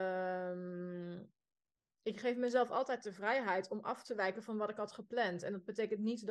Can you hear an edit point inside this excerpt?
no; 0 cuts

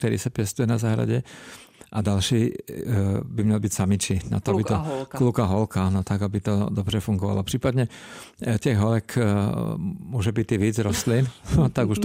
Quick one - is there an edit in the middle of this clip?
no; 0 cuts

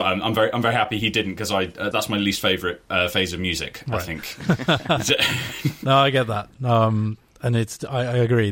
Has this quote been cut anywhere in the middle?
yes; 1 cut; at 1.9 s

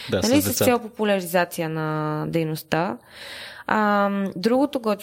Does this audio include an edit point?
no; 0 cuts

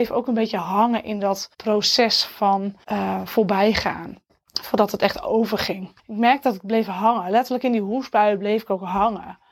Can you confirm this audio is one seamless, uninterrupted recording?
no; 4 cuts; at 1.5 s, 2.8 s, 4.3 s, 6.0 s

